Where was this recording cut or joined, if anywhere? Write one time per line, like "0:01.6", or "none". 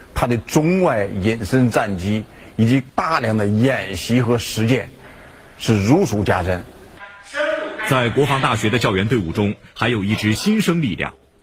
none